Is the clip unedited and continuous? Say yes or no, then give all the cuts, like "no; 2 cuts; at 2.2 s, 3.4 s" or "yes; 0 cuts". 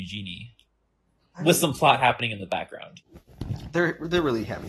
yes; 0 cuts